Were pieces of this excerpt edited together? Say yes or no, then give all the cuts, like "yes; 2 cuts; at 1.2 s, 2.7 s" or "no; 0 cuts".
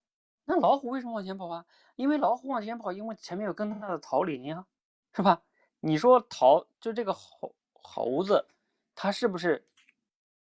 no; 0 cuts